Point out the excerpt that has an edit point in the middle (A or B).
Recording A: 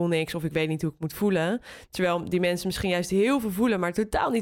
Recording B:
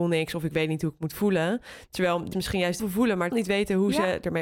B